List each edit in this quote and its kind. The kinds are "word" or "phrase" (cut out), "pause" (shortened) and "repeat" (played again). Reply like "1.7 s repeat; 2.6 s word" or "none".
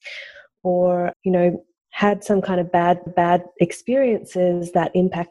1.1 s word; 1.8 s pause; 3.1 s repeat

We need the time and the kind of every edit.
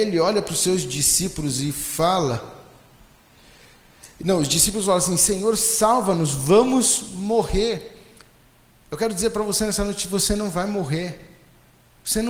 none

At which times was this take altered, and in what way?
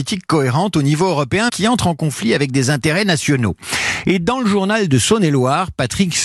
1.5 s word

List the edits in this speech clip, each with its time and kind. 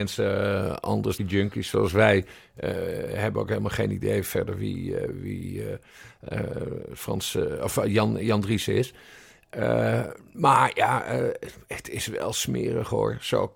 1.2 s phrase

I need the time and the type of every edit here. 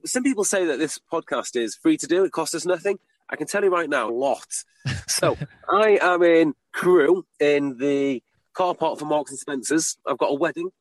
4.1 s phrase

